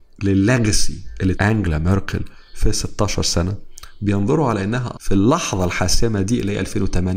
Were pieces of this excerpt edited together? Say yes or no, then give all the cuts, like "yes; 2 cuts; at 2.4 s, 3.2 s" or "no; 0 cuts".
yes; 2 cuts; at 1.3 s, 4.9 s